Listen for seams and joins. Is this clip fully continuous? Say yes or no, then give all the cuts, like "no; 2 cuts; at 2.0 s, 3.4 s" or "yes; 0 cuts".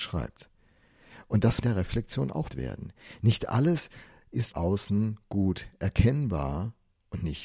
no; 3 cuts; at 1.6 s, 2.5 s, 4.5 s